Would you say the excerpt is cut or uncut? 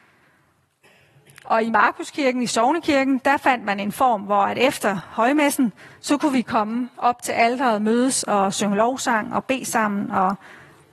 uncut